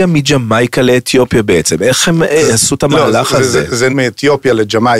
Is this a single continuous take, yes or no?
no